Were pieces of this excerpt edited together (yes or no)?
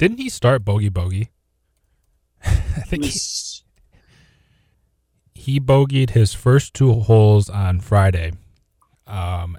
no